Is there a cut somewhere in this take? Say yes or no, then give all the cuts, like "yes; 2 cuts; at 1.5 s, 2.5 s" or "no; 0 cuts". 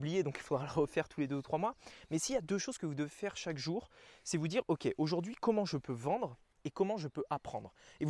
no; 0 cuts